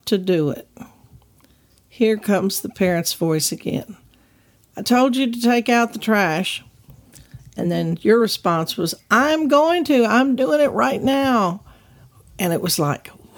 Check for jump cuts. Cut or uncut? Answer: uncut